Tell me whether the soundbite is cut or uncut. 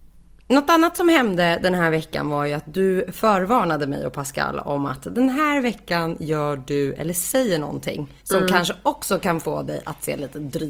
cut